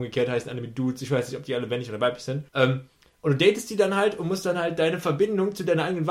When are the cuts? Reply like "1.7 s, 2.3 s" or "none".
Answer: 2.5 s